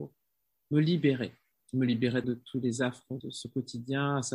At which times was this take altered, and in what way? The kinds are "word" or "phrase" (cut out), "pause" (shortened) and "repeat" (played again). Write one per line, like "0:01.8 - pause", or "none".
0:01.5 - pause
0:02.2 - word
0:03.2 - word